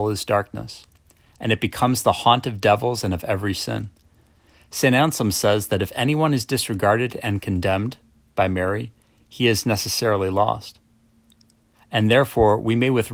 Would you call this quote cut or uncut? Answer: uncut